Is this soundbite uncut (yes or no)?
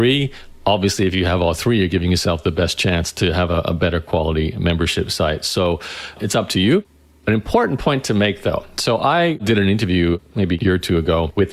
yes